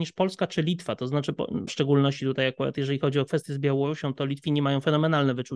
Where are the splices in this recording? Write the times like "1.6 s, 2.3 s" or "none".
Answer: 1.7 s